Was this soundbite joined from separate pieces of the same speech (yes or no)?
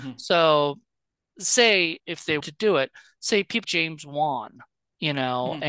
yes